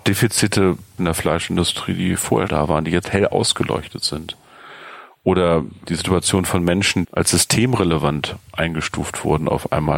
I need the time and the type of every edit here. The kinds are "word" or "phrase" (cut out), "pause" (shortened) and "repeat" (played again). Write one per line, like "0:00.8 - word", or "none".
0:01.0 - phrase
0:02.5 - word
0:03.0 - phrase
0:07.0 - word

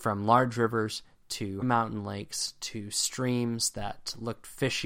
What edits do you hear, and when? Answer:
0:01.6 - word

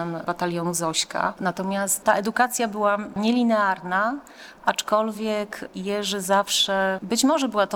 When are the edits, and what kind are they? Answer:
none

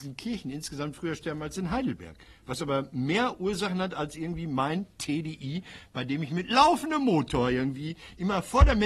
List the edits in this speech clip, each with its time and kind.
none

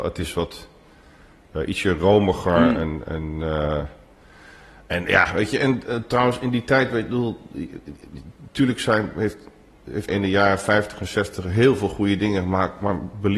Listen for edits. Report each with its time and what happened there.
0:10.1 - word

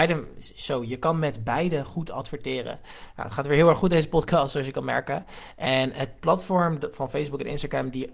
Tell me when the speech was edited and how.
none

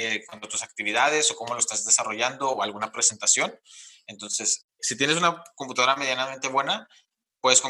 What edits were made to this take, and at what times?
0:04.8 - word

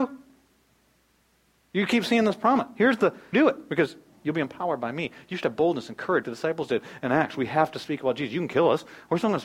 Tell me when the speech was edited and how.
0:03.3 - phrase
0:06.2 - word

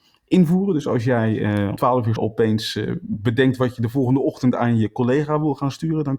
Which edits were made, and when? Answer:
0:01.8 - word
0:02.2 - phrase

